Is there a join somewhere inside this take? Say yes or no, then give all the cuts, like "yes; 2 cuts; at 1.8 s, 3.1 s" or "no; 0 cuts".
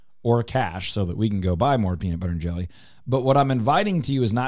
no; 0 cuts